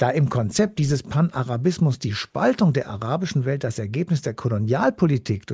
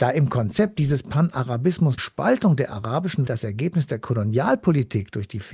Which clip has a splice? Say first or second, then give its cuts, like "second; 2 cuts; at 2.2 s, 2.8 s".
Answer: second; 2 cuts; at 2.0 s, 3.3 s